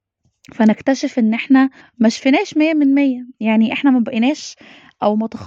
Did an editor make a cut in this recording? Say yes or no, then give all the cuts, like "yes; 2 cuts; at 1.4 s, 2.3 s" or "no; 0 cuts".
yes; 1 cut; at 1.8 s